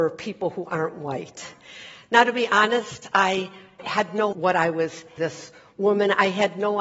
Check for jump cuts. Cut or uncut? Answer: cut